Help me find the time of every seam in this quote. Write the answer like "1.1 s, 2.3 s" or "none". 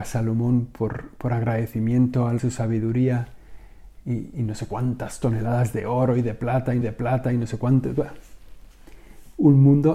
2.4 s, 6.8 s

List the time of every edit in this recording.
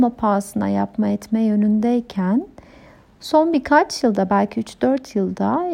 none

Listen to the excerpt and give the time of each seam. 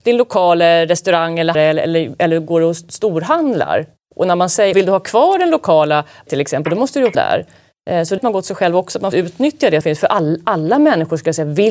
1.5 s, 4.7 s, 6.3 s, 7.1 s, 8.2 s, 9.1 s, 9.8 s

